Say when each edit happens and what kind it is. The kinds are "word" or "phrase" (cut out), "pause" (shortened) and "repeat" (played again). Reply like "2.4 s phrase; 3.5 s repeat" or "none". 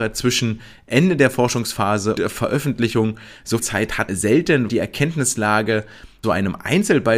2.2 s word; 3.6 s word; 4.1 s word; 4.7 s word; 6.2 s word